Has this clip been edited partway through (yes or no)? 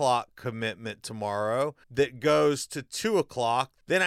yes